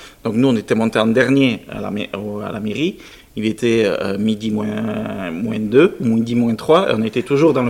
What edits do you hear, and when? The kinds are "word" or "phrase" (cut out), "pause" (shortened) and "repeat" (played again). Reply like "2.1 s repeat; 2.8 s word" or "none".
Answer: none